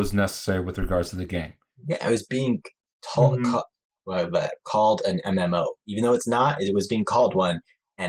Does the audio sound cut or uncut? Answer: uncut